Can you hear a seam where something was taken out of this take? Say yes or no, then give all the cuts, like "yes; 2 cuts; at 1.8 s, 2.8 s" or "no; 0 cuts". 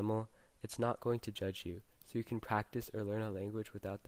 no; 0 cuts